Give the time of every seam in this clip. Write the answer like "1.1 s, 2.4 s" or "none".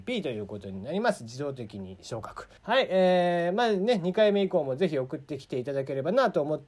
2.6 s